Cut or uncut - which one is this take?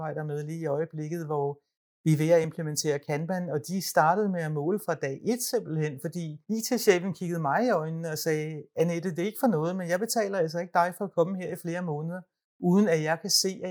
uncut